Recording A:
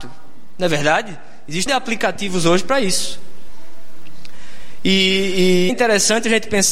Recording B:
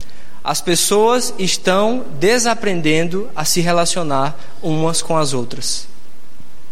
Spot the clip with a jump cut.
A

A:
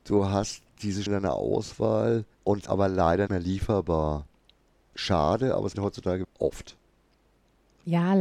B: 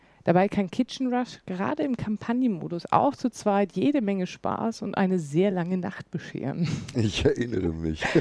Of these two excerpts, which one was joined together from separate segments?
A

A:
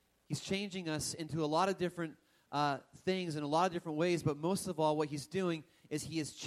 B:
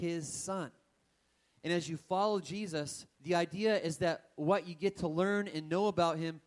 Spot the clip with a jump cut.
B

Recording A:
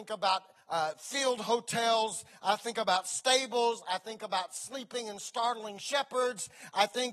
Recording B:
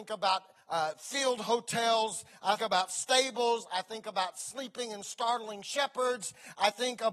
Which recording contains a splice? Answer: B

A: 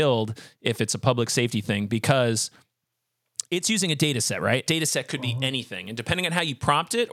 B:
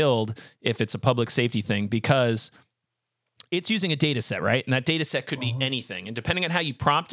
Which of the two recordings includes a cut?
A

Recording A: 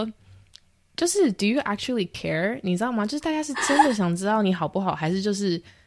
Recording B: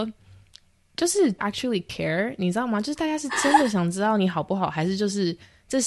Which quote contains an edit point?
B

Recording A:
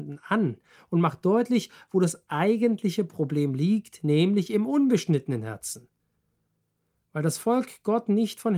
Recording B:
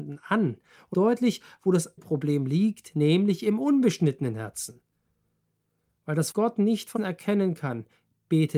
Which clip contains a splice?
B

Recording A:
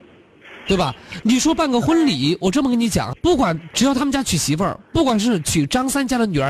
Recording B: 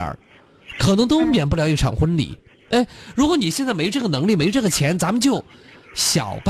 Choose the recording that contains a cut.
A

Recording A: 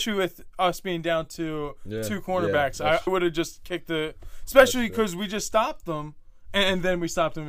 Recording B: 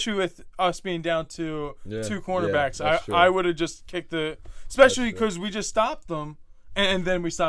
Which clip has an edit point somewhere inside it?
A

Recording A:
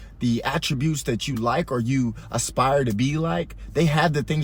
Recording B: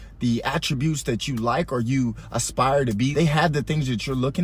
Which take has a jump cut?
B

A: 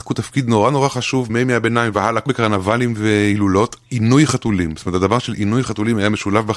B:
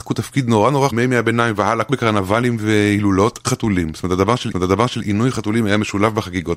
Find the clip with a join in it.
B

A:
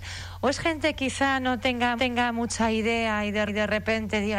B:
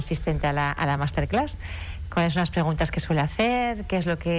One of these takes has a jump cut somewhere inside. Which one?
A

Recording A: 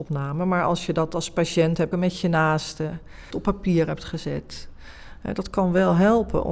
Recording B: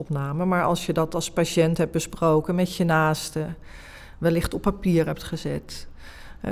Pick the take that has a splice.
A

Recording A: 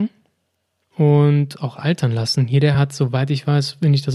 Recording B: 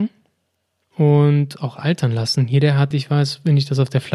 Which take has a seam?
B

